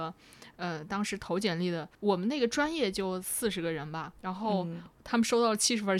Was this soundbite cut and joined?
yes; 2 cuts; at 1.9 s, 4.2 s

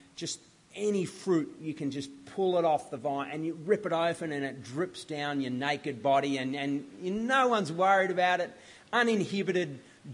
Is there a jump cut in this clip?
no; 0 cuts

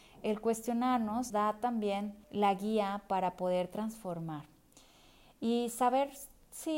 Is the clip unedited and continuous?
no; 2 cuts; at 1.3 s, 2.2 s

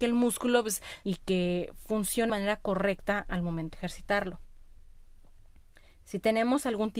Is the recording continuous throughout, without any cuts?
no; 3 cuts; at 1.0 s, 2.3 s, 3.7 s

